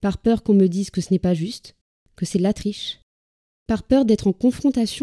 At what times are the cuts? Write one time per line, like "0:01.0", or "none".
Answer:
none